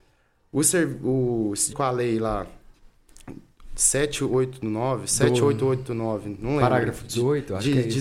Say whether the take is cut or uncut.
cut